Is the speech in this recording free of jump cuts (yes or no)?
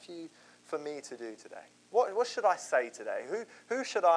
no